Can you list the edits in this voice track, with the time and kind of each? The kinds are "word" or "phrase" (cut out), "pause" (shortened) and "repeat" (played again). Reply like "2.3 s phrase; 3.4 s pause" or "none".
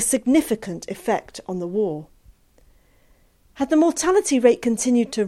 none